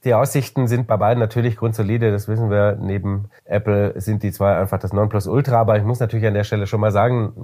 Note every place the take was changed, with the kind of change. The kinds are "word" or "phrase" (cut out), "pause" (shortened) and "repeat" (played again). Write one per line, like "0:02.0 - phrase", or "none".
0:03.4 - pause